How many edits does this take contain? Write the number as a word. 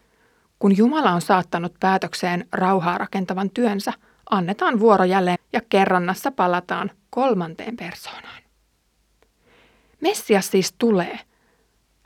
one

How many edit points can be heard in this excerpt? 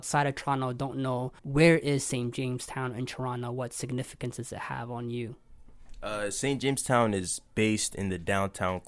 one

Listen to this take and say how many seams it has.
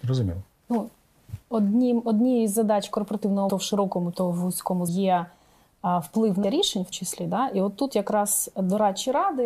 five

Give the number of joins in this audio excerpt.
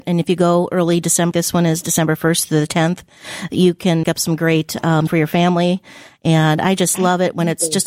three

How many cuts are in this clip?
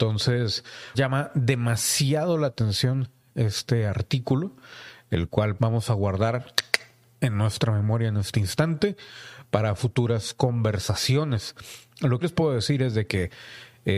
three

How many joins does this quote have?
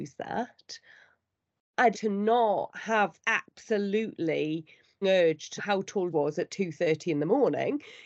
five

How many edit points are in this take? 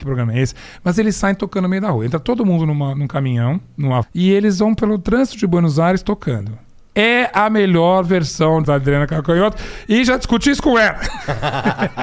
two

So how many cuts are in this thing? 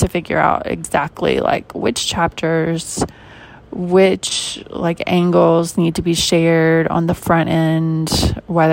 zero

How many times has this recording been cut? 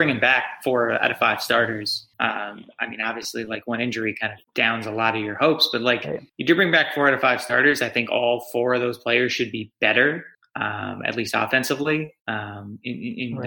five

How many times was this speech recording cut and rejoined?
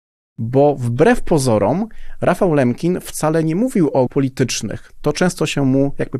one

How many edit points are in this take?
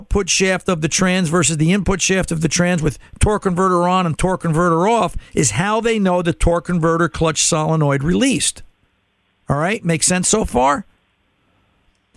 one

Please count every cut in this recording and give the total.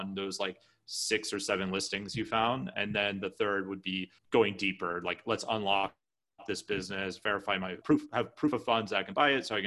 two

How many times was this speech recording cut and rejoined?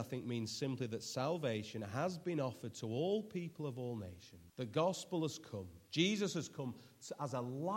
one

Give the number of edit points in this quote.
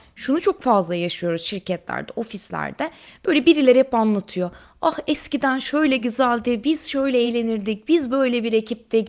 zero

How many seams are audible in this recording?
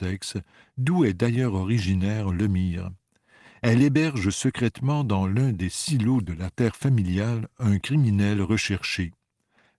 zero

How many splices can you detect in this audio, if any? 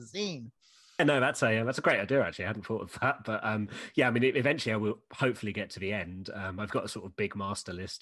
zero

